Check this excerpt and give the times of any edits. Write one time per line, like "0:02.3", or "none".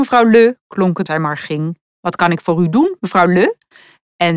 0:01.1
0:01.9